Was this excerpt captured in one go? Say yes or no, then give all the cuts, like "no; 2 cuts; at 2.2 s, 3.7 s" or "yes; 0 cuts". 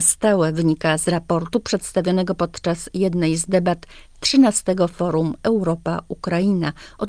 yes; 0 cuts